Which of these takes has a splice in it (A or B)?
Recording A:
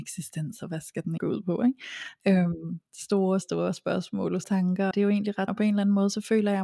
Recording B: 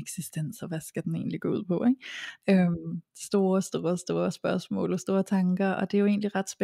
A